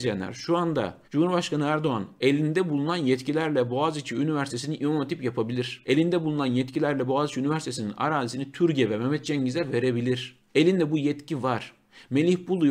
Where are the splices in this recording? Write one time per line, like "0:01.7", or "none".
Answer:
0:01.0
0:10.5